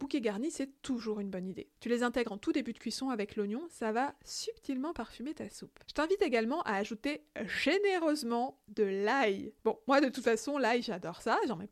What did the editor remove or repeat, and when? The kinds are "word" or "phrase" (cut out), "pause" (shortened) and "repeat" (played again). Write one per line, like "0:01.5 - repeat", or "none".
0:01.8 - pause
0:05.8 - pause
0:09.6 - pause